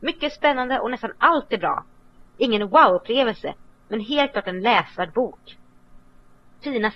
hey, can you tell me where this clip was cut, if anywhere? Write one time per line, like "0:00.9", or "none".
none